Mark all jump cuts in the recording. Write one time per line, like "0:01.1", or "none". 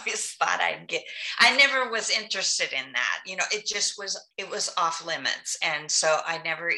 0:04.3

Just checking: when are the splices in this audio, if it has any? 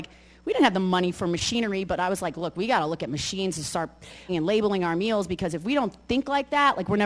0:04.3

